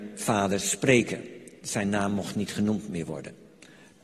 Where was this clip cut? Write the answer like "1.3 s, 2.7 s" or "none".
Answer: none